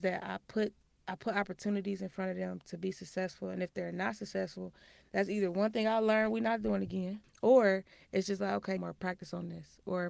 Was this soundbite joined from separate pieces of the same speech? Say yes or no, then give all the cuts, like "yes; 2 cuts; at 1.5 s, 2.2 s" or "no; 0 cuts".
yes; 2 cuts; at 7.2 s, 8.8 s